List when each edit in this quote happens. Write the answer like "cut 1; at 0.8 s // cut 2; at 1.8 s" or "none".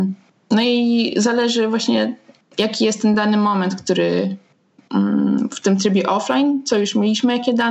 none